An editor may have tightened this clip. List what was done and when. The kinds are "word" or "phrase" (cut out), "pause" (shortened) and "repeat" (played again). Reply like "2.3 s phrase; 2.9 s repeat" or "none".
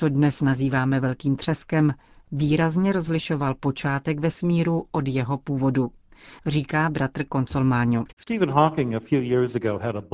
none